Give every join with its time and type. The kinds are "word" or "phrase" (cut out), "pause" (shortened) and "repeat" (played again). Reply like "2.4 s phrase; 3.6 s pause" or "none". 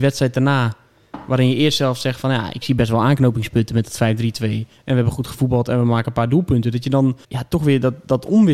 7.2 s pause